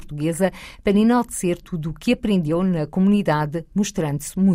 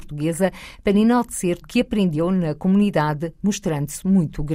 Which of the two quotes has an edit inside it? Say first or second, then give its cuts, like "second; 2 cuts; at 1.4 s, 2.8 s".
second; 1 cut; at 1.6 s